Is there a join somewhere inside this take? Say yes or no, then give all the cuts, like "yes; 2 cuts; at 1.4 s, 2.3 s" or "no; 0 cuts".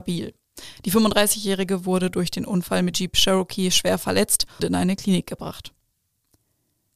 yes; 2 cuts; at 2.9 s, 4.6 s